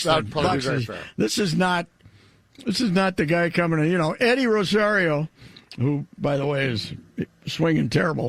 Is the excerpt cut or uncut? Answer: uncut